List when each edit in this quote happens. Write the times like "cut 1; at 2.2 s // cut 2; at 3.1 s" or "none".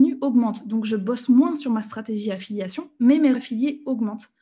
cut 1; at 3.3 s